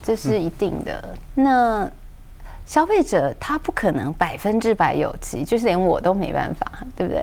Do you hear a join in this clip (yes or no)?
yes